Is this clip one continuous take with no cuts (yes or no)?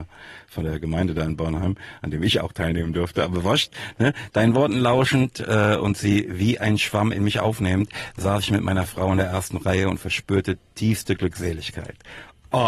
yes